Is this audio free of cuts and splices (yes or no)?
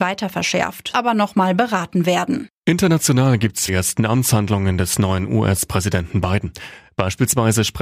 no